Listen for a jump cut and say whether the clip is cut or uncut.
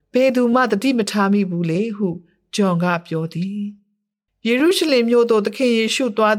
uncut